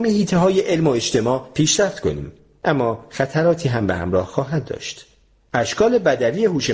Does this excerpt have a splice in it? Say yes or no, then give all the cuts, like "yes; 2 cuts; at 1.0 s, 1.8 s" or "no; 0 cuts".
no; 0 cuts